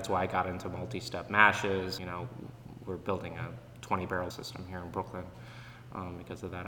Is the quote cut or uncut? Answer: cut